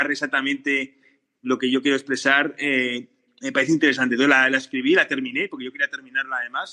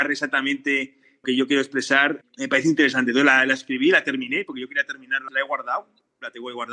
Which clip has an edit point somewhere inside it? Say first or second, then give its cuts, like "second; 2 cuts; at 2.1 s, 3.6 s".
second; 3 cuts; at 1.2 s, 2.2 s, 5.3 s